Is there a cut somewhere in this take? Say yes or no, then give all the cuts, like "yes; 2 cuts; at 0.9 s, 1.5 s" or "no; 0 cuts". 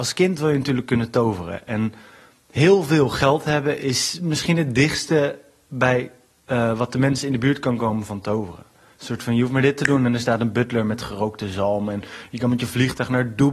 no; 0 cuts